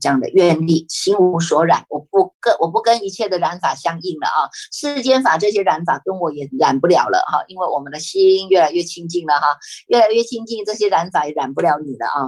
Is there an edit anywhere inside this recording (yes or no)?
no